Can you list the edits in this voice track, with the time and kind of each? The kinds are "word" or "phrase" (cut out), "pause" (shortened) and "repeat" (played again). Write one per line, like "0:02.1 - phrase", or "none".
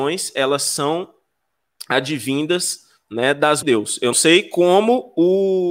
0:03.6 - phrase
0:04.1 - word